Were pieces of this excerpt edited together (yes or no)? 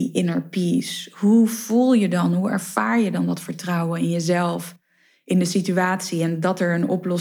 no